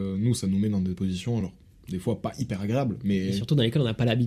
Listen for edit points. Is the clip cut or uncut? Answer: uncut